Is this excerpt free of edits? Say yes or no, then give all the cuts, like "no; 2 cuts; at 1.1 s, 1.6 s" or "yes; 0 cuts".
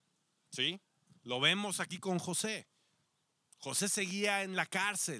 yes; 0 cuts